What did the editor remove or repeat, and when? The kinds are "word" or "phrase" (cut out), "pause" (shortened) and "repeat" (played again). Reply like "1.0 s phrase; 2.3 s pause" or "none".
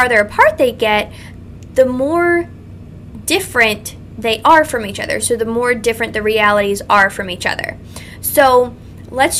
none